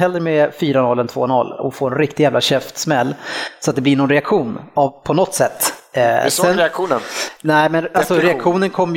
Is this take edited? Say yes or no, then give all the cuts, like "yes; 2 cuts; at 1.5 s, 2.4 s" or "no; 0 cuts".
no; 0 cuts